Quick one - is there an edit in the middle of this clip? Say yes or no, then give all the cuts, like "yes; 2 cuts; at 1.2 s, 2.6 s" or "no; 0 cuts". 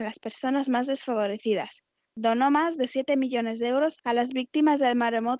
no; 0 cuts